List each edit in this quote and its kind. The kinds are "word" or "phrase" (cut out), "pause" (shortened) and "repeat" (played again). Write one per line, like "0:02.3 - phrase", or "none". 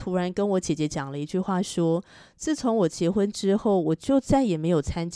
none